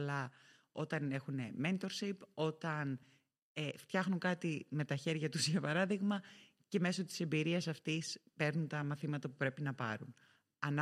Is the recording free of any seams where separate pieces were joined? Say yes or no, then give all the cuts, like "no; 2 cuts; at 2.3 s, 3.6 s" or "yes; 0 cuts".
yes; 0 cuts